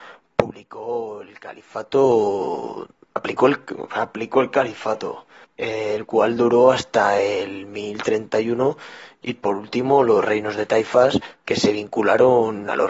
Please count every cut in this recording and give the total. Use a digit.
1